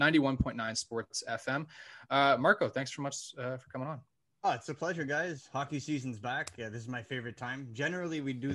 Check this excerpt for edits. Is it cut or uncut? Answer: uncut